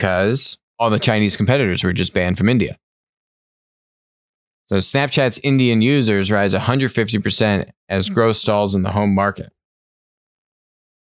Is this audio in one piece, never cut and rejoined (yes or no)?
yes